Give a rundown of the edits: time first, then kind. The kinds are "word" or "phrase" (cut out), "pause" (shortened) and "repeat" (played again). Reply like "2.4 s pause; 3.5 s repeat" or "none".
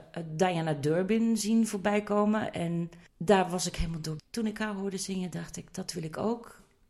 3.1 s pause; 4.2 s word